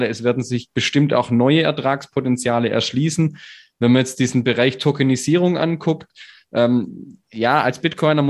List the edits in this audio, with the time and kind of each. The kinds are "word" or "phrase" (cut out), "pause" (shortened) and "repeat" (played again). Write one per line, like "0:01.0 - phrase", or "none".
none

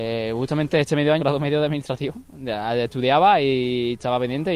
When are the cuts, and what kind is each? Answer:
0:01.2 - phrase

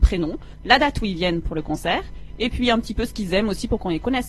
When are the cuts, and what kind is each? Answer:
none

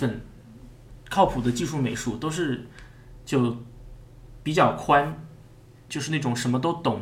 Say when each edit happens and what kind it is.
0:05.9 - word

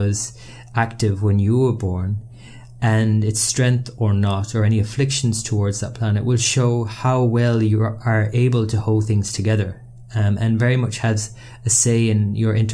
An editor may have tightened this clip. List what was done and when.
none

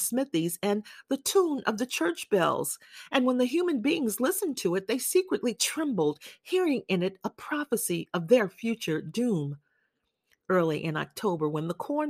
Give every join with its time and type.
none

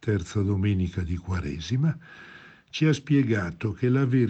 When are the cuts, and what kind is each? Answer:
none

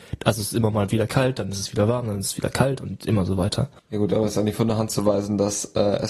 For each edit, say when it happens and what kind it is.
0:03.8 - pause

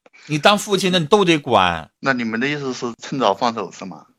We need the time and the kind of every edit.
0:02.0 - pause

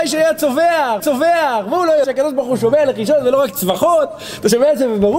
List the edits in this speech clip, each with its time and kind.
0:01.0 - repeat
0:02.0 - word

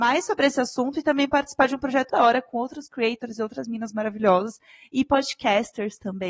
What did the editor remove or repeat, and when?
0:02.1 - word

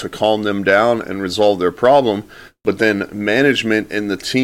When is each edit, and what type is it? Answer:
none

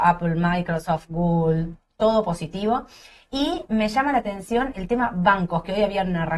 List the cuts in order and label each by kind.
none

